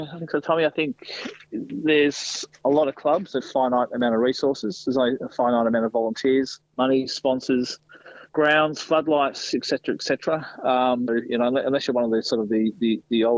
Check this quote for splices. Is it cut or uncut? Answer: cut